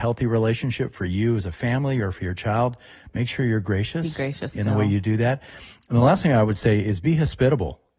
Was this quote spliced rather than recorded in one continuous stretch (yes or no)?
no